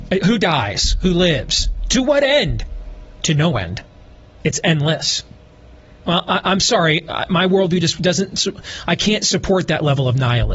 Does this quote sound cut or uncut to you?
uncut